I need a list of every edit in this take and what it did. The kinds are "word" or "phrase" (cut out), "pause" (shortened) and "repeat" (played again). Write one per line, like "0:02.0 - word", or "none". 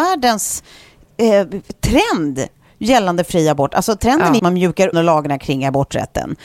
0:04.4 - phrase
0:04.9 - phrase